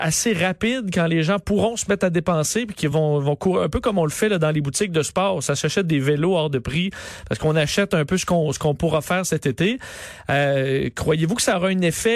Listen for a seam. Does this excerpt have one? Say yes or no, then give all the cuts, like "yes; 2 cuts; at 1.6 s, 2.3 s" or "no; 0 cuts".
no; 0 cuts